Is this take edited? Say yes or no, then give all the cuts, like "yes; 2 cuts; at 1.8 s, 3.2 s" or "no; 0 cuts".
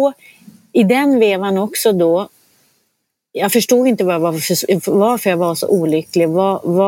no; 0 cuts